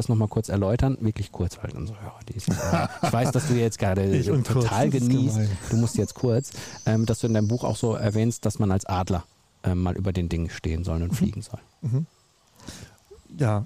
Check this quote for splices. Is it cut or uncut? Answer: uncut